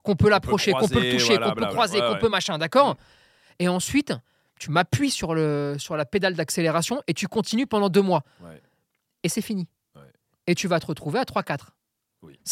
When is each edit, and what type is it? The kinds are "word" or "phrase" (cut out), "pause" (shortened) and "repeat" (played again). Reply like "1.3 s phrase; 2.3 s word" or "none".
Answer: none